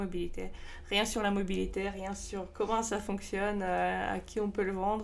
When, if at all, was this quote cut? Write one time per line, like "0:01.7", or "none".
none

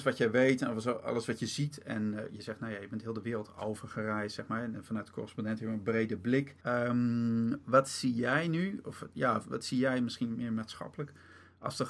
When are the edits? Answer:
0:06.6

